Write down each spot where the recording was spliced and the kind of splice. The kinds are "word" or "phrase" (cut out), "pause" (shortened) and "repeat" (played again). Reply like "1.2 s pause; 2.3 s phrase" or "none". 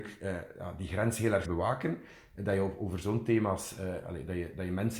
1.4 s word